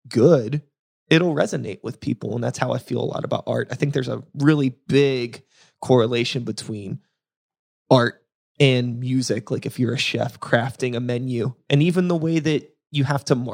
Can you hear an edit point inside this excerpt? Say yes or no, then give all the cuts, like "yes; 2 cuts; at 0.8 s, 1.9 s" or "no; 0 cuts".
no; 0 cuts